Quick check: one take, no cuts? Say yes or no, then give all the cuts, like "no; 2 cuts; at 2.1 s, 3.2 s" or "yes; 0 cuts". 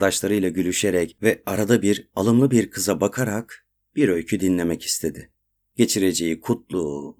yes; 0 cuts